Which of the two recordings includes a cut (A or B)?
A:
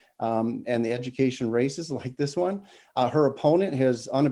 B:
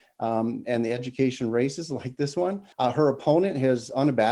B